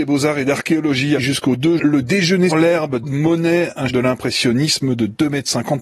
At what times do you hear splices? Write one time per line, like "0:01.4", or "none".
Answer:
0:01.2
0:01.8
0:02.5
0:03.0
0:03.9